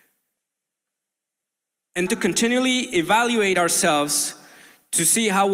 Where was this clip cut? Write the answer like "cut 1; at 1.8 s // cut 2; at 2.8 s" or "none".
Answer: cut 1; at 2.1 s

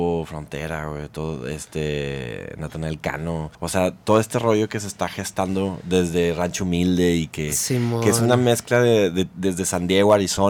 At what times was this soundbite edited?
cut 1; at 3.5 s

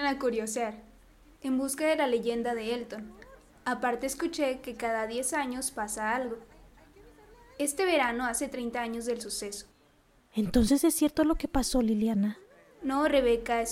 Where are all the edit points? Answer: none

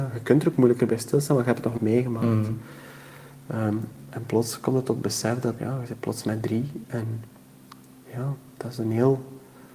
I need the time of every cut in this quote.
cut 1; at 1.8 s // cut 2; at 5.6 s

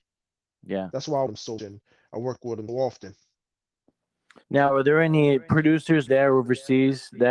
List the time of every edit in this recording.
cut 1; at 1.3 s // cut 2; at 1.6 s // cut 3; at 2.7 s // cut 4; at 4.4 s // cut 5; at 6.1 s

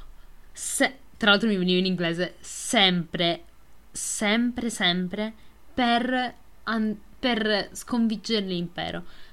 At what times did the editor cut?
none

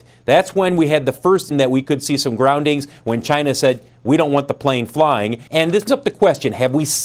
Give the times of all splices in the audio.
cut 1; at 1.5 s // cut 2; at 5.5 s // cut 3; at 5.9 s

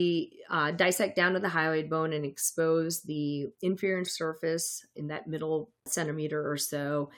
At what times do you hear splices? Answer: cut 1; at 4.1 s // cut 2; at 5.8 s

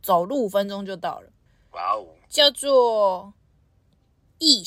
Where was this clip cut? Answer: cut 1; at 1.5 s

